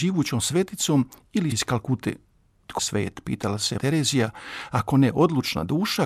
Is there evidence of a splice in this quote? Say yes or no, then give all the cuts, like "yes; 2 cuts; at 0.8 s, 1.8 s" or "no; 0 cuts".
yes; 3 cuts; at 1.5 s, 2.8 s, 3.8 s